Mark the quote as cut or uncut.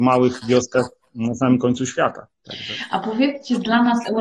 cut